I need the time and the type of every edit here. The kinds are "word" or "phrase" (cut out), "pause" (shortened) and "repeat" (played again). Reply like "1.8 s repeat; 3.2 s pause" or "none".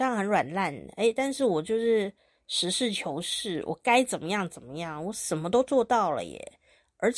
none

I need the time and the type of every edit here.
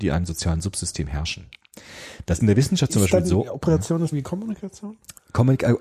2.4 s word; 4.1 s word

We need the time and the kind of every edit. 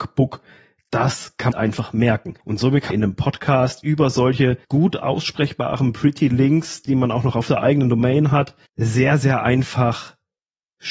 1.5 s phrase; 2.4 s pause; 2.9 s word; 4.6 s pause; 8.6 s pause

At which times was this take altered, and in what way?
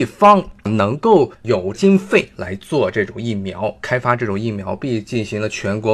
1.3 s pause

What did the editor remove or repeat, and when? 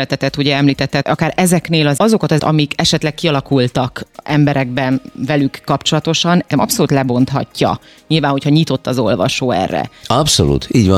1.0 s word; 2.0 s word; 2.4 s word; 6.5 s word

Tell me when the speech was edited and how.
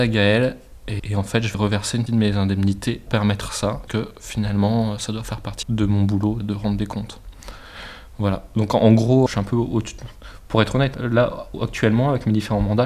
1.0 s word; 1.5 s word; 2.1 s word; 3.1 s word; 3.9 s word; 5.6 s word; 6.4 s word; 9.3 s word; 10.9 s word

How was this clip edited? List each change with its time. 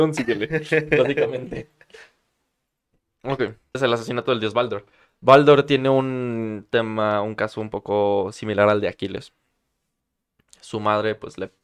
3.7 s word

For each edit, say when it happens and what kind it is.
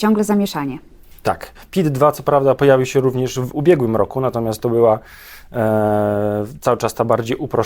none

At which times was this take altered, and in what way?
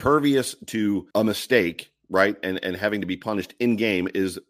1.1 s pause

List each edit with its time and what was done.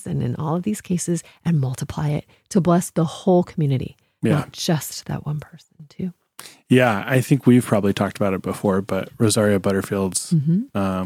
none

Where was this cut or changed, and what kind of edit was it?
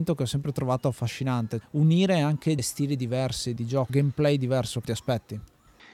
1.6 s word; 2.6 s word; 3.6 s word; 3.9 s word; 4.8 s word

